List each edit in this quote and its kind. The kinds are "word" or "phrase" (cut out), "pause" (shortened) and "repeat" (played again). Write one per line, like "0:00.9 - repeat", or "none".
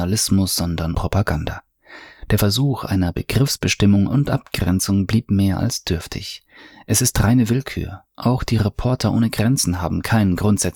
0:00.9 - word

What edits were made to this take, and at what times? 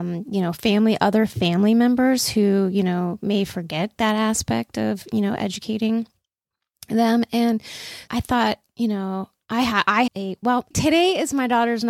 0:08.1 - word
0:10.1 - word
0:10.7 - word

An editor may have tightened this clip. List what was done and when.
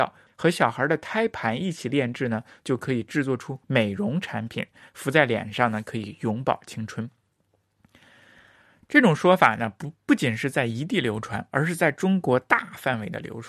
none

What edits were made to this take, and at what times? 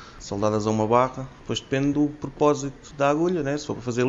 none

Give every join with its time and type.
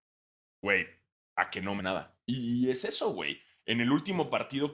0:01.8 - word

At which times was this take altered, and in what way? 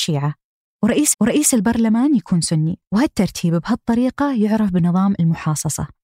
0:01.1 - repeat
0:02.9 - pause

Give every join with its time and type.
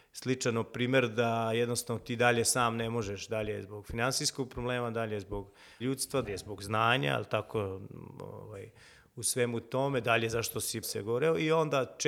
0:05.8 - word
0:06.2 - word
0:10.8 - word

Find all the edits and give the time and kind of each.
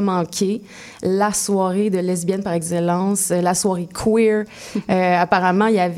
none

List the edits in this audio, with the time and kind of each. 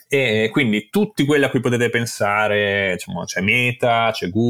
none

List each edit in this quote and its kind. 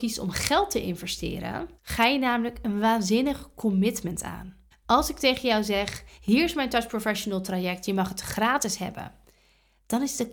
0:01.8 - pause
0:04.7 - pause

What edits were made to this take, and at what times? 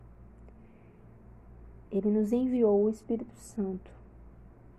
0:01.9 - pause

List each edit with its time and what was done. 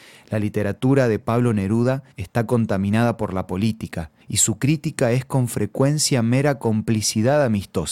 0:02.1 - pause
0:04.2 - pause

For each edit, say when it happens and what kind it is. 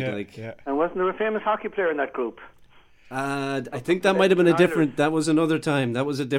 none

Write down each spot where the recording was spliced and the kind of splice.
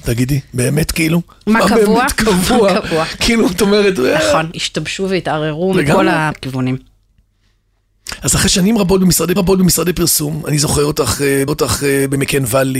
0:04.5 - word
0:06.3 - word
0:09.4 - repeat
0:11.5 - repeat

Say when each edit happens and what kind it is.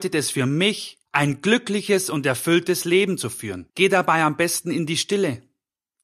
0:01.1 - pause
0:03.7 - pause

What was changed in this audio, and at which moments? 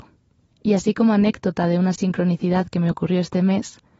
none

